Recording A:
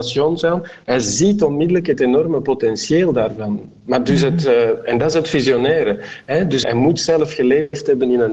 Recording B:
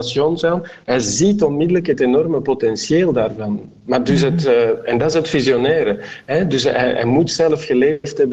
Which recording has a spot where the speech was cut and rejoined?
A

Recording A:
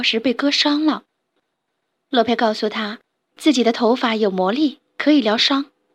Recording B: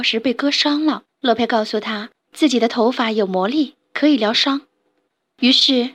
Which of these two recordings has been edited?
B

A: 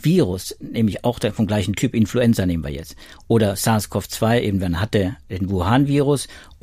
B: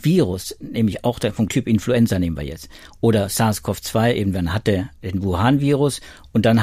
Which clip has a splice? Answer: B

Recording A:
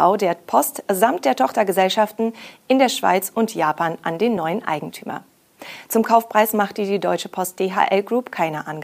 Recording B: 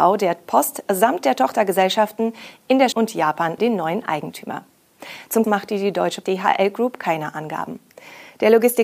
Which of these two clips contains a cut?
B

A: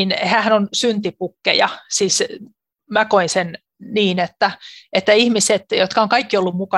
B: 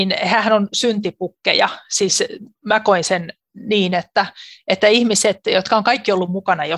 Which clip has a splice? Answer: B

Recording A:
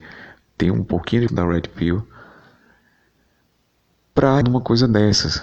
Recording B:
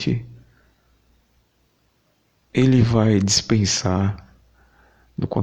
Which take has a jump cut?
A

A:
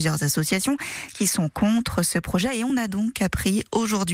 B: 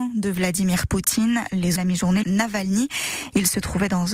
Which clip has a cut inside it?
B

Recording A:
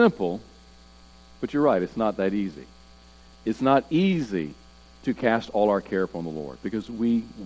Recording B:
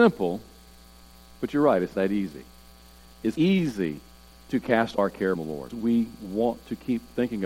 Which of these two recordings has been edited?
B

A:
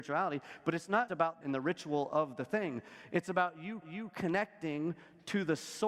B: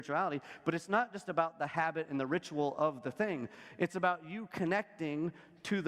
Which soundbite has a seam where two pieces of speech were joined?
A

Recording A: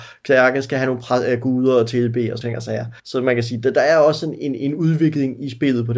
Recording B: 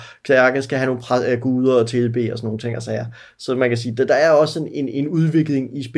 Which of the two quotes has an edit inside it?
A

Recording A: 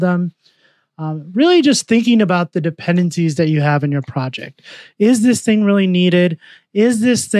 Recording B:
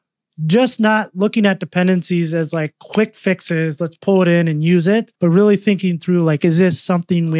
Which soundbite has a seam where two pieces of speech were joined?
B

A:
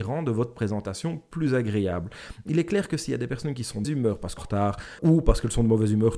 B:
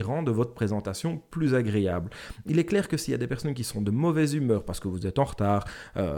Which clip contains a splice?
A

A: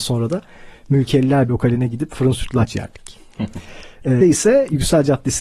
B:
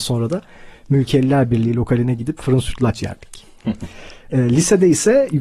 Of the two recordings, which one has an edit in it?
A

